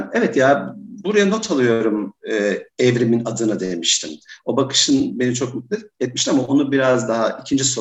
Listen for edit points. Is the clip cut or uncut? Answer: uncut